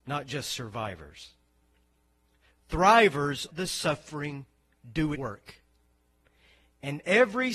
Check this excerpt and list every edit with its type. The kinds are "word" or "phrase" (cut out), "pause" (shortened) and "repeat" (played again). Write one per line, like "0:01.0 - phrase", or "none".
0:03.5 - word
0:05.1 - word